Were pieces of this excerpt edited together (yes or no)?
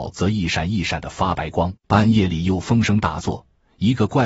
yes